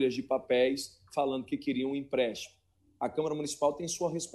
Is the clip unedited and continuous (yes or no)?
yes